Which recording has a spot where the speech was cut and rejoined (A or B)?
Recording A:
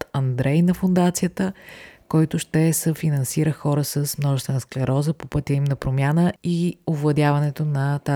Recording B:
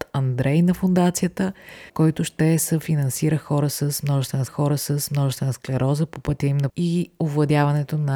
B